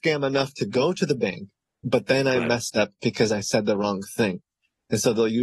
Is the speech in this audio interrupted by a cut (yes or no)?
yes